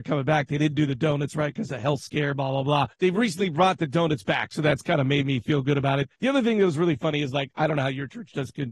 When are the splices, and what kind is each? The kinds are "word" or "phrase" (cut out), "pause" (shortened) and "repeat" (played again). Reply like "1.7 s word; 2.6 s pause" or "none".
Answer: 2.9 s pause; 6.1 s pause